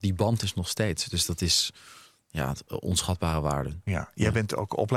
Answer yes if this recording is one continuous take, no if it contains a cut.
yes